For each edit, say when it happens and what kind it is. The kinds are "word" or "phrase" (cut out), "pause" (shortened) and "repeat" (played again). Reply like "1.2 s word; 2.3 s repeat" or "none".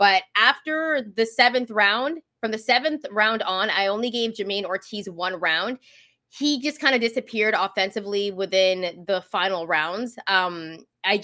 none